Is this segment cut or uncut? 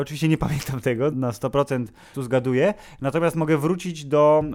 cut